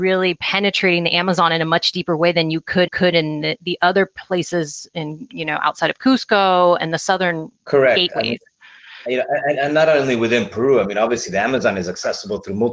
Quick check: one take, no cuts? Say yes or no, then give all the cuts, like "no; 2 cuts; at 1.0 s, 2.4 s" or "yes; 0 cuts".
no; 3 cuts; at 2.9 s, 6.8 s, 7.6 s